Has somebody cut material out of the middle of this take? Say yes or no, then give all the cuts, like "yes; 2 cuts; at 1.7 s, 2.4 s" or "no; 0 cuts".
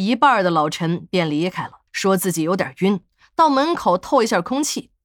yes; 1 cut; at 1.9 s